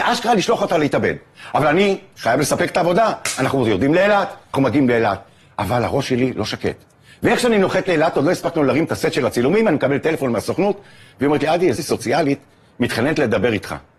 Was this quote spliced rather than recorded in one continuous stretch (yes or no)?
yes